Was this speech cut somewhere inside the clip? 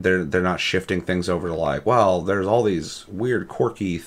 no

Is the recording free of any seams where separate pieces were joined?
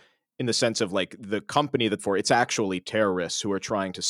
no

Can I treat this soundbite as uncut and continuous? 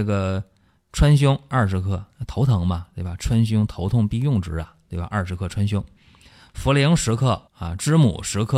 no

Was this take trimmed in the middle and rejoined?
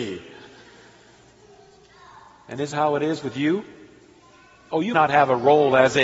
yes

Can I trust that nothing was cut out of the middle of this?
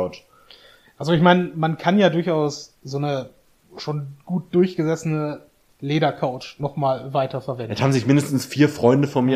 yes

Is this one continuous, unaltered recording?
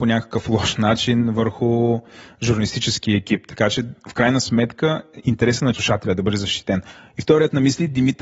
yes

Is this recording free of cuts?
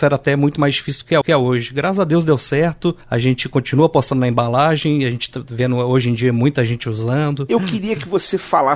no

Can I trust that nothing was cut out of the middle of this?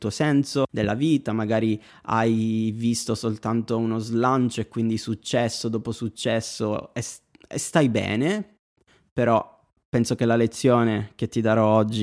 yes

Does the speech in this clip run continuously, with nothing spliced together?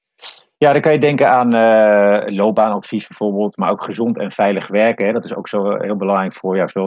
yes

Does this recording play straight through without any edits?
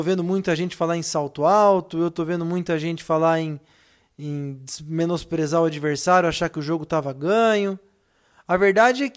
yes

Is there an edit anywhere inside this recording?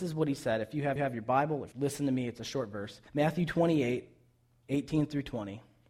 yes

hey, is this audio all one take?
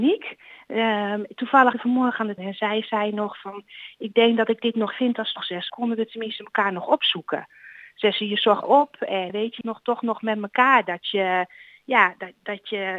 no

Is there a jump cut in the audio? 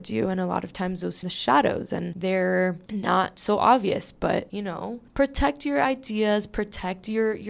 yes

